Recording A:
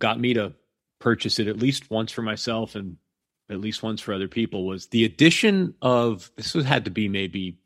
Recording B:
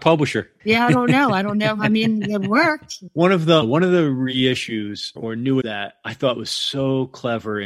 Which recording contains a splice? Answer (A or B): B